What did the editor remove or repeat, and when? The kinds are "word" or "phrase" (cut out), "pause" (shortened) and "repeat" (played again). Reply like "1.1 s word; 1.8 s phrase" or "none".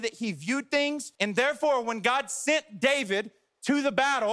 1.1 s pause